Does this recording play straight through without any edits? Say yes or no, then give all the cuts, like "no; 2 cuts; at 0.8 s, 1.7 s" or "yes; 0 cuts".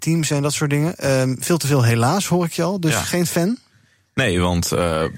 yes; 0 cuts